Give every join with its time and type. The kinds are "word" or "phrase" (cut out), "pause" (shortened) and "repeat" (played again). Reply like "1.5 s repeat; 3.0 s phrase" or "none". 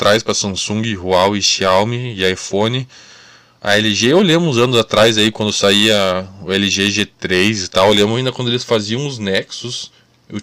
none